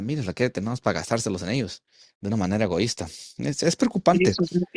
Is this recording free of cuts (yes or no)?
yes